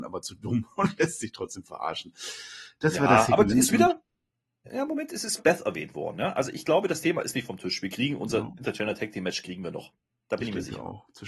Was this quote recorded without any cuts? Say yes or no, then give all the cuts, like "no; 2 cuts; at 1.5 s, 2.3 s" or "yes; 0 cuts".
no; 1 cut; at 5.4 s